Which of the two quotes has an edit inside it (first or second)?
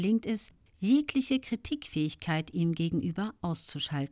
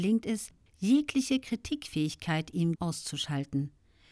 second